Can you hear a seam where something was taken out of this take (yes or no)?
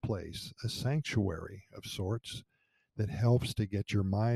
no